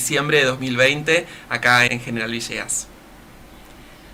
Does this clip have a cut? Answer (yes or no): yes